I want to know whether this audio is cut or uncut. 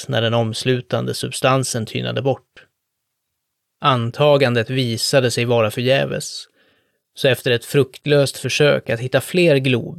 uncut